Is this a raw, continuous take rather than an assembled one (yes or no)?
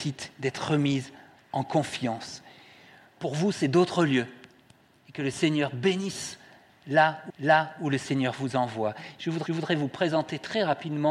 no